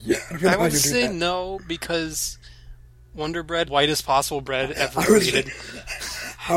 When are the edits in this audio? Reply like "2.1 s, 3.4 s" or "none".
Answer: 3.6 s